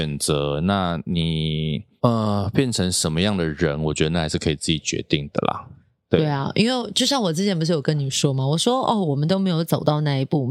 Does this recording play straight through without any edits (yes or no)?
yes